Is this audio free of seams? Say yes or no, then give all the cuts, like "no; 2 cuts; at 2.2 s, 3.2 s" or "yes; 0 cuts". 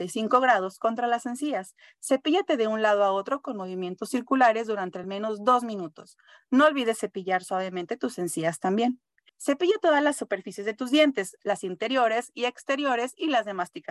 yes; 0 cuts